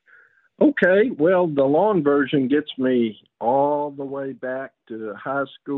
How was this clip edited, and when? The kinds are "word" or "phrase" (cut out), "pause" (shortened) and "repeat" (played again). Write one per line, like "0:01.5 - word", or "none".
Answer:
none